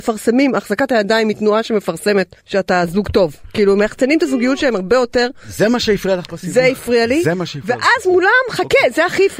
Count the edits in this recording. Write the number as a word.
one